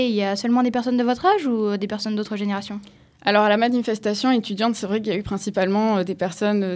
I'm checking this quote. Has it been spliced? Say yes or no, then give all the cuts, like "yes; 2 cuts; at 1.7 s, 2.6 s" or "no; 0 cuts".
no; 0 cuts